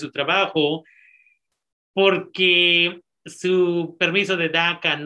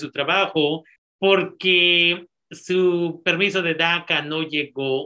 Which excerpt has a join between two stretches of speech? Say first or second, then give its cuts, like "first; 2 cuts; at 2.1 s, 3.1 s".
second; 1 cut; at 1.0 s